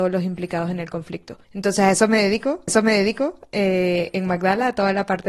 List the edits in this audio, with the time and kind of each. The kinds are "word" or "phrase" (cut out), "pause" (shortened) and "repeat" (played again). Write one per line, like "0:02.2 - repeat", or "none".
0:01.4 - pause
0:02.7 - repeat